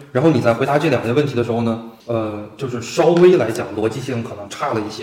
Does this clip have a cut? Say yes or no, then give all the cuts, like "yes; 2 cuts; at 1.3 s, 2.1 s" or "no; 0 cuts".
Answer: yes; 1 cut; at 2.0 s